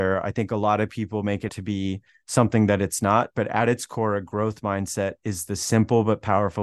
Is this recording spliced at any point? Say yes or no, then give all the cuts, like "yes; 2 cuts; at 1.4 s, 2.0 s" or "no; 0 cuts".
yes; 2 cuts; at 1.5 s, 2.1 s